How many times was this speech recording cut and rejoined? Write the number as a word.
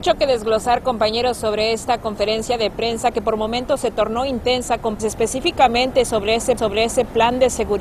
two